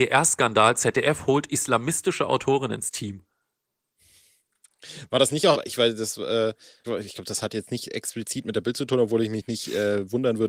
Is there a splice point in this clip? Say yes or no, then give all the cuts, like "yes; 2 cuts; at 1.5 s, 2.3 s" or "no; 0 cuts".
yes; 2 cuts; at 5.5 s, 6.8 s